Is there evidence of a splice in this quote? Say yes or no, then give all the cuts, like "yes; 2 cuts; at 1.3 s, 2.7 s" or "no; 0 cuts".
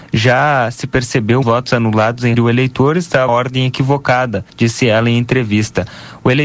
yes; 4 cuts; at 1.4 s, 2.3 s, 3.3 s, 4.5 s